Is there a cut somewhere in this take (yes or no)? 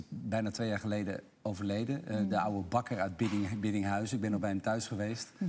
no